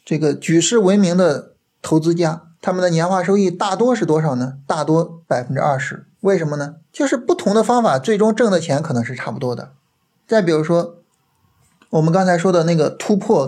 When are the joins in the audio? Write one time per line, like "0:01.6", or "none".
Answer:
0:02.6
0:06.1
0:06.9
0:10.0